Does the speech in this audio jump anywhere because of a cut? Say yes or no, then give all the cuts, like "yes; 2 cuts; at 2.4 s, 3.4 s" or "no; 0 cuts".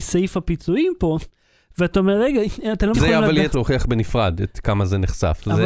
yes; 3 cuts; at 2.9 s, 3.5 s, 4.6 s